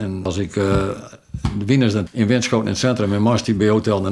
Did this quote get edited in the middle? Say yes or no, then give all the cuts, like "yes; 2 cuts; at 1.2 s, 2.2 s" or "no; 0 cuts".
yes; 1 cut; at 2.1 s